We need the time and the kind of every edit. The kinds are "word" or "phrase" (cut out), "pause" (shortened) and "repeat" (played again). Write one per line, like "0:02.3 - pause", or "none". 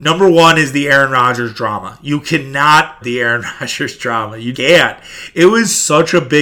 0:03.0 - word
0:04.5 - word